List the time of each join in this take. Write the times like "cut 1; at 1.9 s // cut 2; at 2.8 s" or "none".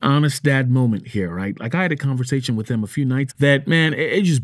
cut 1; at 3.3 s